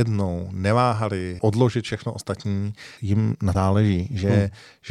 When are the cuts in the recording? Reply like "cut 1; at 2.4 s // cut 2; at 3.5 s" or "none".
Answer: cut 1; at 1.4 s // cut 2; at 3.0 s // cut 3; at 3.5 s